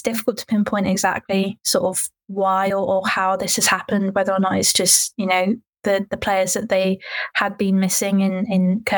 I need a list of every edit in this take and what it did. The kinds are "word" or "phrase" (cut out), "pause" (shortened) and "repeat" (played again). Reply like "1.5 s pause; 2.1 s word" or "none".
none